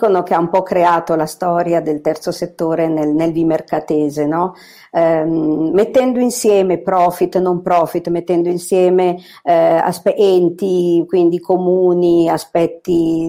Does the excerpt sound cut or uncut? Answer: uncut